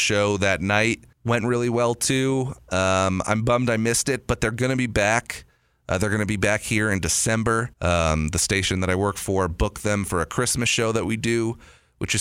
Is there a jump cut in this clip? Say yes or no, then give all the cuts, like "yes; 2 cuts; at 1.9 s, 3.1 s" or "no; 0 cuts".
yes; 2 cuts; at 1.1 s, 7.7 s